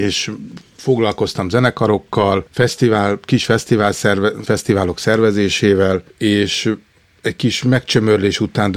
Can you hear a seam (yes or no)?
yes